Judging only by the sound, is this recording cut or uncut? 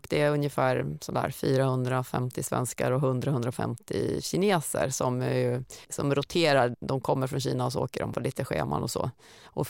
cut